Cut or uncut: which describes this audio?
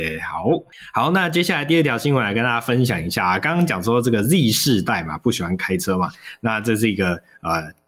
uncut